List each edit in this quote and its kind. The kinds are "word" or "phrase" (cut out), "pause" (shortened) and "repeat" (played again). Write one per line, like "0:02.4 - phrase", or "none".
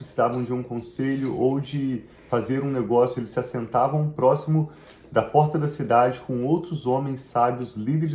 none